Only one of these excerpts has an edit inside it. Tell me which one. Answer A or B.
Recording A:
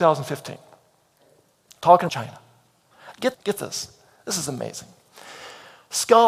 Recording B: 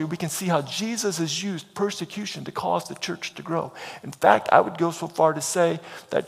A